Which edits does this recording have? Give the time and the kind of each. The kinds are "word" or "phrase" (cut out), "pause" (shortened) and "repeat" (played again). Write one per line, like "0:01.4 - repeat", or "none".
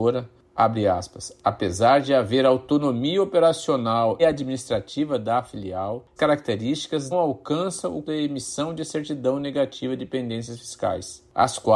0:04.2 - word
0:06.2 - word
0:07.1 - word
0:08.0 - word